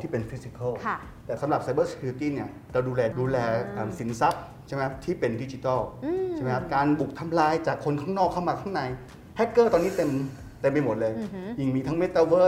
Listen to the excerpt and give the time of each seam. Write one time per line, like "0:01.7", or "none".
0:03.1

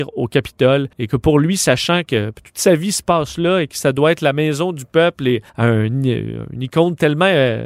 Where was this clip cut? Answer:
0:00.9
0:05.5

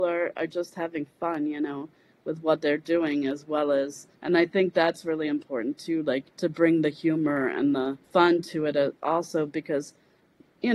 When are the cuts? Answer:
0:04.1
0:06.3
0:08.0
0:09.0

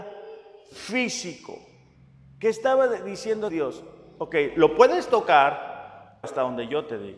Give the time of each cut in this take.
0:03.5
0:06.2

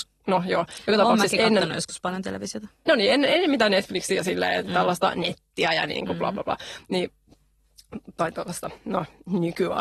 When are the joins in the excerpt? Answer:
none

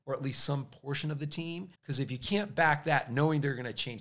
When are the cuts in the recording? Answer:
0:01.7

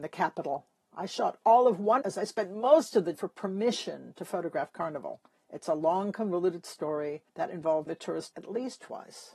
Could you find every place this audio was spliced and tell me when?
0:02.0
0:03.1
0:05.3
0:07.3
0:07.9
0:08.3

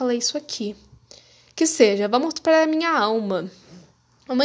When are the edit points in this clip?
none

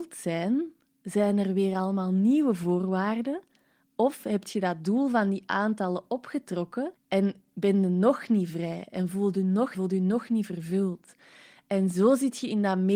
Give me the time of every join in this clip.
0:07.0
0:09.7

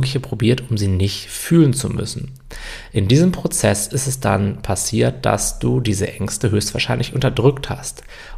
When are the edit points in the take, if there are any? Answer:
none

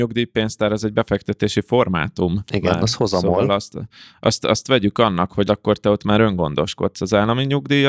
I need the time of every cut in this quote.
0:03.7
0:05.4

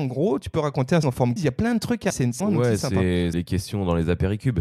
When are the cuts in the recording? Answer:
0:01.0
0:01.4
0:02.1
0:02.4
0:03.3

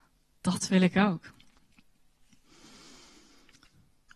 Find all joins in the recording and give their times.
none

